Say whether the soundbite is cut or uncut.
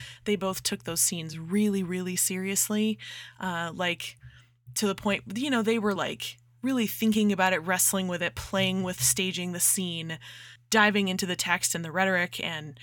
uncut